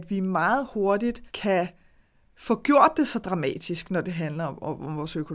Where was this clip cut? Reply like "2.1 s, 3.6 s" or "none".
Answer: 1.3 s